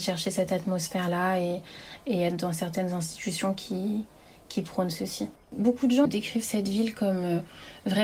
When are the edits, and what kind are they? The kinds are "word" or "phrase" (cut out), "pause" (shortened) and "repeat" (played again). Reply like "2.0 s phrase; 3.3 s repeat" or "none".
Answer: 5.4 s pause; 6.0 s word